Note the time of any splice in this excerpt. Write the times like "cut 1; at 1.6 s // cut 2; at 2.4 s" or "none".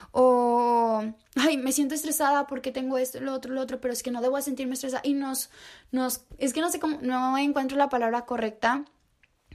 none